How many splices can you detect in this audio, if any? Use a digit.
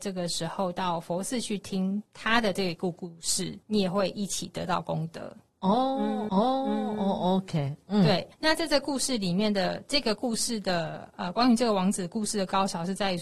5